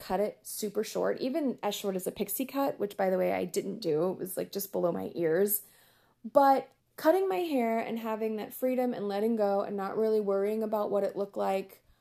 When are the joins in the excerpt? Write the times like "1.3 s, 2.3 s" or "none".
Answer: 6.8 s

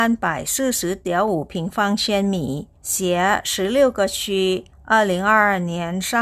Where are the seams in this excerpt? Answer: 2.8 s, 4.7 s

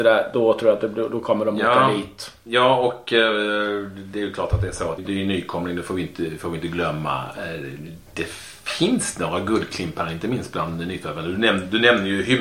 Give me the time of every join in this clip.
5.0 s

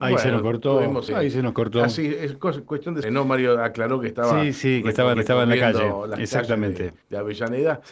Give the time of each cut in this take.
1.1 s, 3.0 s, 5.1 s, 7.0 s

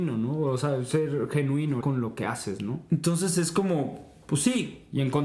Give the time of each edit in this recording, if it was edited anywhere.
1.8 s

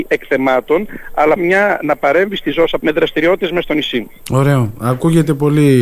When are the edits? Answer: 1.4 s, 2.8 s

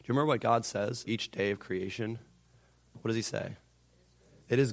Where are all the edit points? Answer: 1.1 s

